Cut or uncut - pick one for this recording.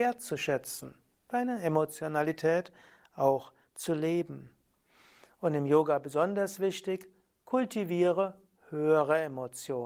uncut